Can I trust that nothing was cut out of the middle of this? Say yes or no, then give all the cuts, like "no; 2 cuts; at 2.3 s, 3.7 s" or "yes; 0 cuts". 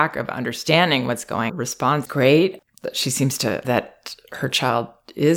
no; 3 cuts; at 1.5 s, 2.1 s, 3.6 s